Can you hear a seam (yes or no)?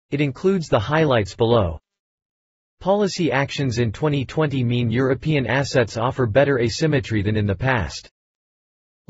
no